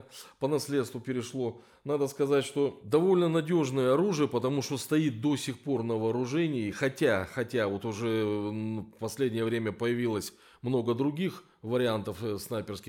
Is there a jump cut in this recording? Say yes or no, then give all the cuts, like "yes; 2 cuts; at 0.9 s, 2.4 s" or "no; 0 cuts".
no; 0 cuts